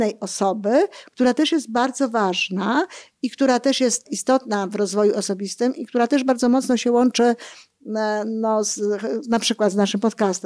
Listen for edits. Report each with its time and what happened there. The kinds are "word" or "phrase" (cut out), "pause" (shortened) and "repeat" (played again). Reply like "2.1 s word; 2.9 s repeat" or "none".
4.1 s word

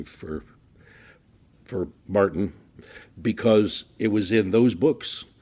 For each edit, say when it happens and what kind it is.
1.9 s pause

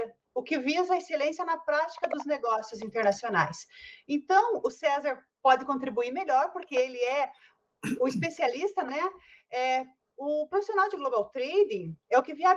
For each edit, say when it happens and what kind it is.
8.9 s word

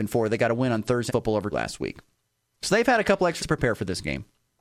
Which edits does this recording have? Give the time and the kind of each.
1.1 s word; 1.5 s word; 3.4 s word

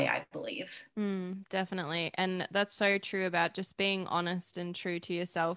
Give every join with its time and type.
none

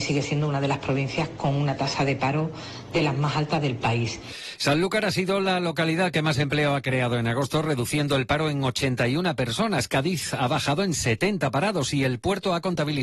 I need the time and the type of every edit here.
none

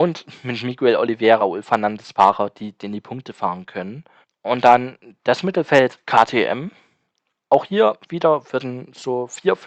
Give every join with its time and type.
1.4 s word; 2.8 s word; 4.2 s pause

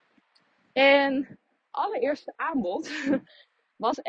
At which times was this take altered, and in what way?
1.7 s word

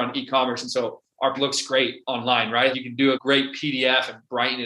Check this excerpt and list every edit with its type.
1.3 s word; 2.7 s word; 3.1 s word

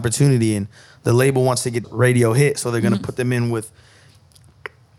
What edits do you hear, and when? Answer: 1.8 s word

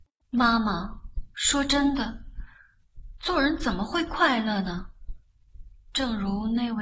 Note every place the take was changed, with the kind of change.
1.3 s pause

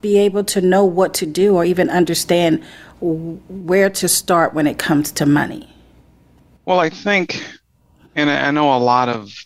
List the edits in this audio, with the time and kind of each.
none

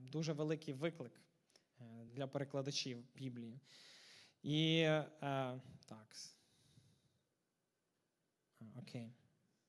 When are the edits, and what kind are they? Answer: none

